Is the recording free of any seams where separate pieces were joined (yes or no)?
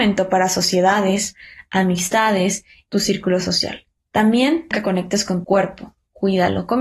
no